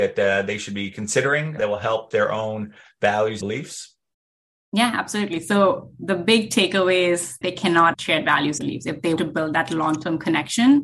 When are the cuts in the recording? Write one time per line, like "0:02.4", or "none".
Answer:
0:01.6
0:02.1
0:03.4
0:07.4
0:07.9
0:08.6
0:09.2